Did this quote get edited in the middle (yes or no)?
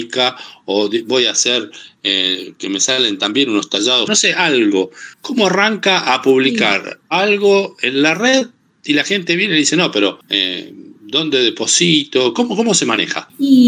yes